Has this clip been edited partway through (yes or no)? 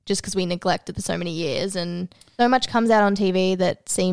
yes